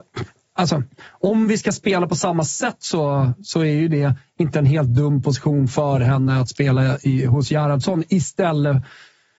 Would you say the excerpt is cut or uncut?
uncut